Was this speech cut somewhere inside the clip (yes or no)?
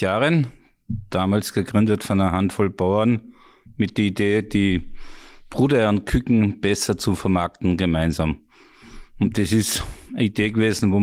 no